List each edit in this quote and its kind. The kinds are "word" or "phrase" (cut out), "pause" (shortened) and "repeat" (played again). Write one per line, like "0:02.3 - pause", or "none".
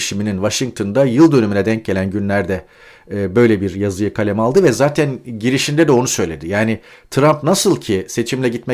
none

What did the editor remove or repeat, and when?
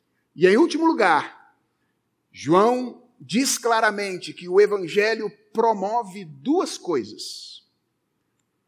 none

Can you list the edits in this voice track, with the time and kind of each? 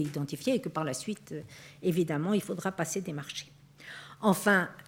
none

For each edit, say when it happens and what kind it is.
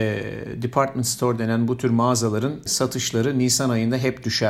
0:02.7 - word

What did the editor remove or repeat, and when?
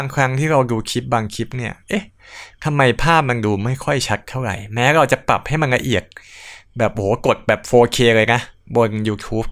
none

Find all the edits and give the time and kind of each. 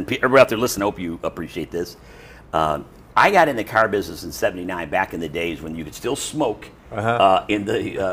none

